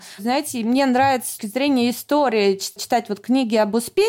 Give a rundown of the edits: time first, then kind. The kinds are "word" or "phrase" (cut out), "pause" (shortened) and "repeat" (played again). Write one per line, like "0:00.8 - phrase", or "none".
0:01.4 - word
0:02.8 - word

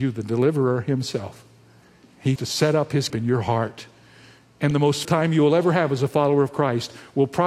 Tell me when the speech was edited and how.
0:02.4 - word
0:03.1 - word
0:05.0 - word

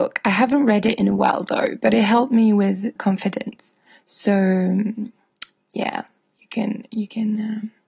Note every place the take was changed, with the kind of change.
0:03.0 - word

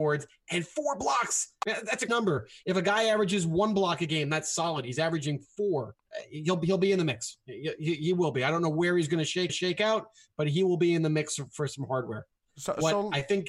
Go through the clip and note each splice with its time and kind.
0:02.1 - word
0:09.5 - repeat

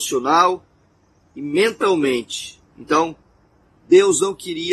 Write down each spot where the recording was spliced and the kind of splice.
0:02.7 - pause

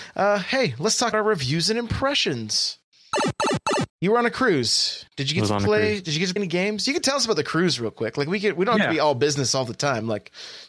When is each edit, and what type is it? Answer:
0:01.1 - word
0:03.9 - pause
0:05.1 - pause
0:06.4 - word

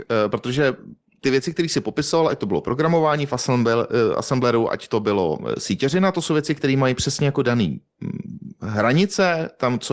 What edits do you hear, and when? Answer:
none

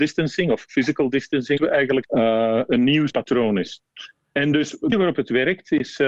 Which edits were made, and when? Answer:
0:01.6 - word
0:02.0 - word
0:03.1 - word
0:04.9 - word

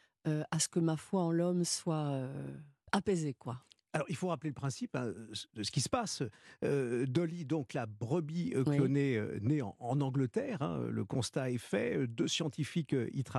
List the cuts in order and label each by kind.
none

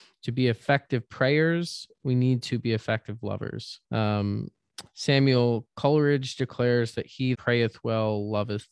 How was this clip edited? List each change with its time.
0:03.8 - pause
0:07.3 - word

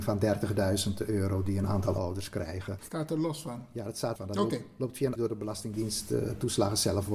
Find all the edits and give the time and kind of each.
0:04.2 - phrase
0:05.2 - phrase

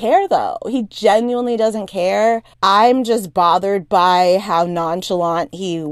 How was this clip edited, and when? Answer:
0:02.5 - pause

